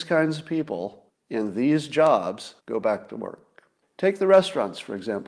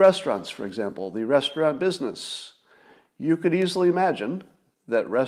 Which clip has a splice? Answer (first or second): first